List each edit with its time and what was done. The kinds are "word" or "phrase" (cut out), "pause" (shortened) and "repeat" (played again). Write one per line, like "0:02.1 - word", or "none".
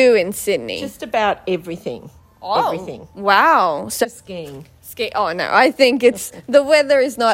0:04.0 - word